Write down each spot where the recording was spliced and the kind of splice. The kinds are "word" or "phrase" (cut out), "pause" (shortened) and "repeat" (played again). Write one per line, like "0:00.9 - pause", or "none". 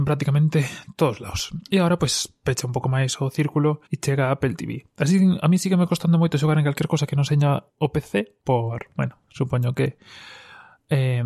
0:01.7 - pause
0:03.9 - pause
0:07.7 - pause
0:08.4 - pause